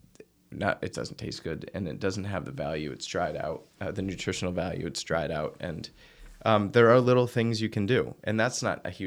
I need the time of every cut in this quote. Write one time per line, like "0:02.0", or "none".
0:00.9
0:03.7